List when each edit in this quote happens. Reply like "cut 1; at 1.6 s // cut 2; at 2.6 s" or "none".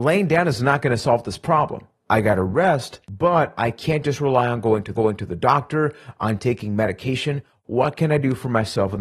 cut 1; at 3.0 s // cut 2; at 5.0 s

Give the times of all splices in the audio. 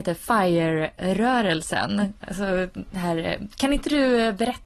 none

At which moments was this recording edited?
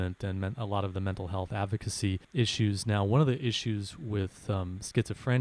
cut 1; at 2.2 s

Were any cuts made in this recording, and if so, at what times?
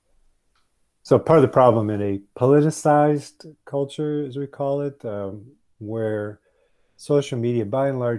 none

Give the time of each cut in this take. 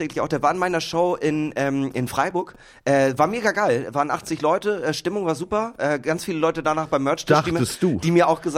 none

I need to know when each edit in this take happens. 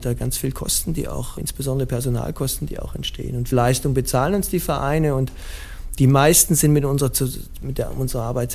cut 1; at 1.4 s // cut 2; at 3.5 s

